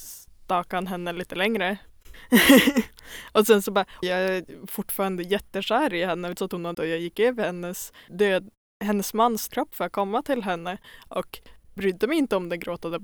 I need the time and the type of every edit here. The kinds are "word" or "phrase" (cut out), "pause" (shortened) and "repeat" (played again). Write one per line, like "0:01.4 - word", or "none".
0:04.0 - word
0:06.4 - word
0:06.7 - word
0:08.1 - word
0:09.5 - word
0:11.8 - word